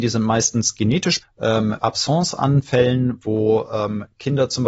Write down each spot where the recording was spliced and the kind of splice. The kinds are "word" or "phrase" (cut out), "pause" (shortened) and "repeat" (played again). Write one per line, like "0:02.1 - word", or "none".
0:01.2 - word
0:01.8 - word